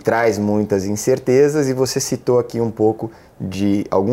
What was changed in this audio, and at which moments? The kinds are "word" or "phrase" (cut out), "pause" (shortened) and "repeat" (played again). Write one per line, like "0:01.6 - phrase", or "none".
none